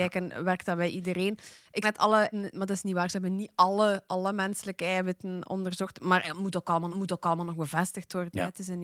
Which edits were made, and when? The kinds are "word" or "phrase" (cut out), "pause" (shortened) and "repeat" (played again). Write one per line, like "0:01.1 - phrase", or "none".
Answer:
0:01.8 - word
0:02.3 - word
0:06.9 - repeat